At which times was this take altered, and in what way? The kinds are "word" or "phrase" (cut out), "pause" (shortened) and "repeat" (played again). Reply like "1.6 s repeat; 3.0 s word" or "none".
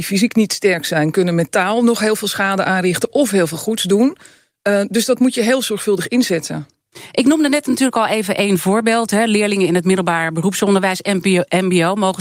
none

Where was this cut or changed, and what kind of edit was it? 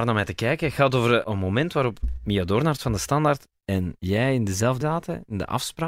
1.2 s word; 4.0 s pause; 4.8 s word

